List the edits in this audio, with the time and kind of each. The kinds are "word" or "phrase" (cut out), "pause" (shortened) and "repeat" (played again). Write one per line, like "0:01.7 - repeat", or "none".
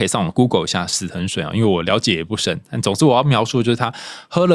none